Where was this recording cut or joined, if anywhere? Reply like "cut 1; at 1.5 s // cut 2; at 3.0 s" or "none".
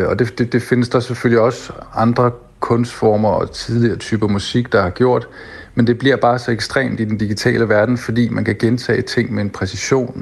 none